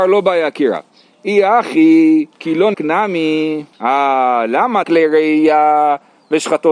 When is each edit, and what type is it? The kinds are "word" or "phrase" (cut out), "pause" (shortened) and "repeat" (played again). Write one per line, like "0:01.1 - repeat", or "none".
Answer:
0:02.3 - pause
0:02.7 - word
0:03.7 - pause
0:04.8 - phrase